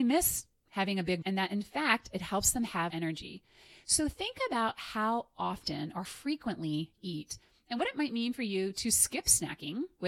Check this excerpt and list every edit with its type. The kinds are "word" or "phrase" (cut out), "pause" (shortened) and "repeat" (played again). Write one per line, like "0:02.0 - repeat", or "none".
0:01.2 - word
0:02.9 - word
0:06.0 - word
0:07.0 - word